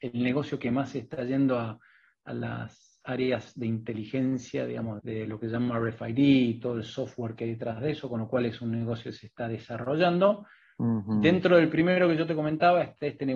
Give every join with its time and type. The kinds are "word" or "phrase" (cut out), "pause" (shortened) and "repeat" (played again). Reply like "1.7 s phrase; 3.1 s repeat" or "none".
5.0 s word